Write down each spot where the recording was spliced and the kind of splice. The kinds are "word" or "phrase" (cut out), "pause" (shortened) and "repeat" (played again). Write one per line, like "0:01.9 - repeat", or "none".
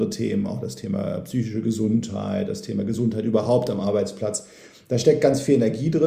none